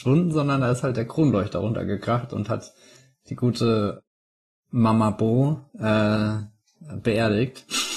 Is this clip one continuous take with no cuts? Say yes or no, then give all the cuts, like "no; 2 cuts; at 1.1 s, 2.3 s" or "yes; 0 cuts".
yes; 0 cuts